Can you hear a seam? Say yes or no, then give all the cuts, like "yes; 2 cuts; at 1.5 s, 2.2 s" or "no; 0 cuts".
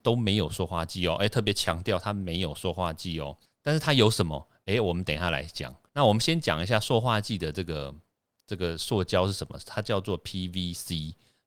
no; 0 cuts